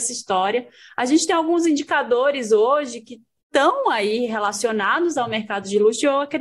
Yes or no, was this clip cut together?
no